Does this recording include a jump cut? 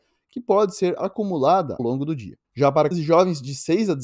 yes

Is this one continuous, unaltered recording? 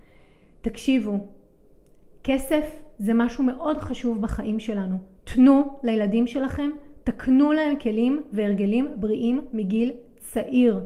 yes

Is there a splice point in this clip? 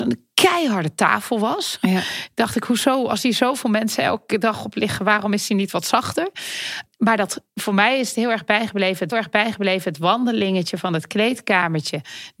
yes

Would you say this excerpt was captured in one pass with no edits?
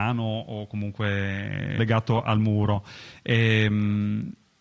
no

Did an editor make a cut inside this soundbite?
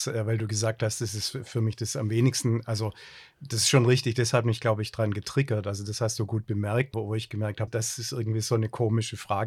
yes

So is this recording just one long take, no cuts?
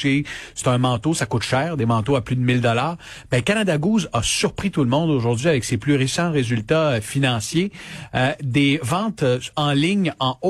yes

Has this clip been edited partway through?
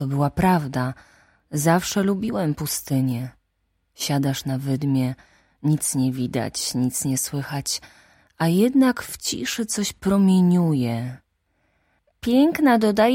no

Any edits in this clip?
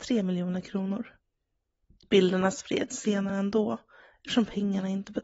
no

